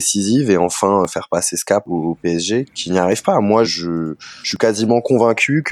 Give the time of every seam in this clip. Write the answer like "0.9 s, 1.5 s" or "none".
1.9 s, 2.6 s, 3.6 s